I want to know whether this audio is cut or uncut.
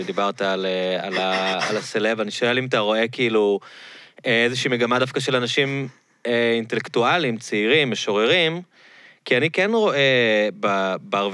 uncut